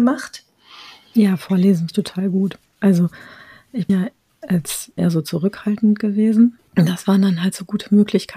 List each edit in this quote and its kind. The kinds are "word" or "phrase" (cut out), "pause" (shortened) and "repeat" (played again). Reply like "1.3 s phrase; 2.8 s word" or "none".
1.9 s word; 3.9 s word; 5.0 s word; 6.6 s word